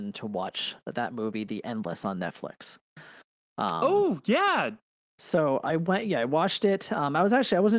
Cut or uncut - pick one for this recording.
uncut